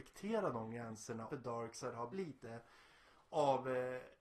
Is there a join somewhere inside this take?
yes; 2 cuts; at 1.3 s, 2.1 s

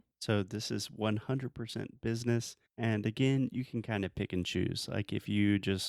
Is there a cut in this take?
yes; 1 cut; at 2.7 s

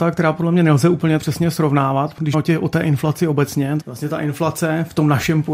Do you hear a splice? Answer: yes; 3 cuts; at 1.2 s, 2.3 s, 3.8 s

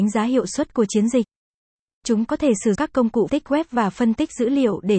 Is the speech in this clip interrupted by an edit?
yes; 3 cuts; at 2.3 s, 2.7 s, 3.3 s

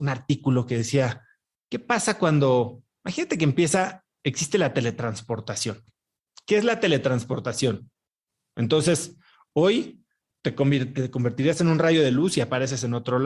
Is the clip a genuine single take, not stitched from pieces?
no; 1 cut; at 10.3 s

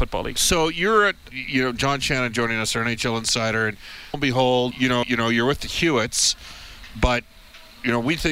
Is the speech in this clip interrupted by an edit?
yes; 4 cuts; at 1.3 s, 4.1 s, 4.7 s, 5.0 s

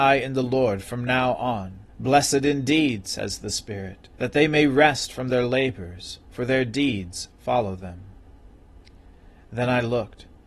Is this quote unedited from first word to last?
no; 2 cuts; at 1.9 s, 4.2 s

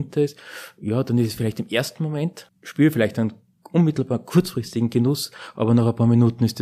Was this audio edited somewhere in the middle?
no; 0 cuts

